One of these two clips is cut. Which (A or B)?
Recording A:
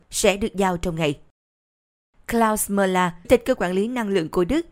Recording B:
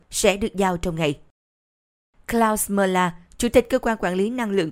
A